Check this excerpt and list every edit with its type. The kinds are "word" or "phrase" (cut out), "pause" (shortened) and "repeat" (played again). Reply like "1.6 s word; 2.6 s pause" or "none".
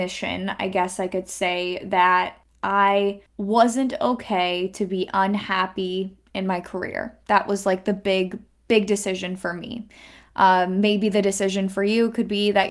none